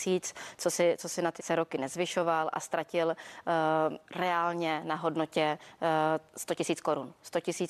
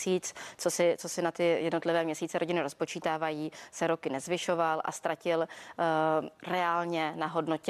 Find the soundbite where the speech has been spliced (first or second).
first